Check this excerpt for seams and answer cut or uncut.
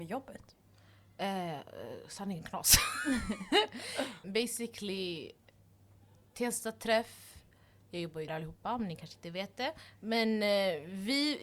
cut